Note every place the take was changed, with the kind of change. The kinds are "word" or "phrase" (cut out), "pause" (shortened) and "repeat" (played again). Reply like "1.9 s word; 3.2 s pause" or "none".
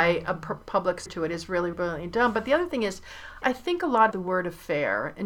1.1 s word; 1.7 s word; 3.4 s word; 4.1 s word